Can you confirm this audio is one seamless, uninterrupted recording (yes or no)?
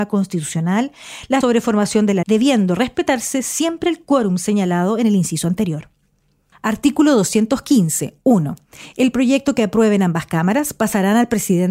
no